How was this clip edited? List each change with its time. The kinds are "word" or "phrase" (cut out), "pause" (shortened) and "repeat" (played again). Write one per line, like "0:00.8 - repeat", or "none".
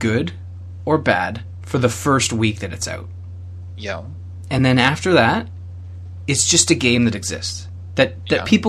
none